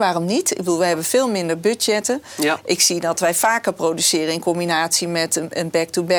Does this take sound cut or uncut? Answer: uncut